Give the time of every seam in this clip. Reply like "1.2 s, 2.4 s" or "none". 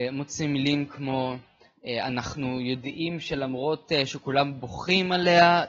none